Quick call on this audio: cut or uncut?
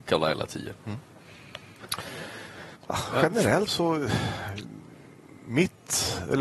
cut